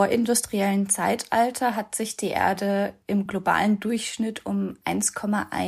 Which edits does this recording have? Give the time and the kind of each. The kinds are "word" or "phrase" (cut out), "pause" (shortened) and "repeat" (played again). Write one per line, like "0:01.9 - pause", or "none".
none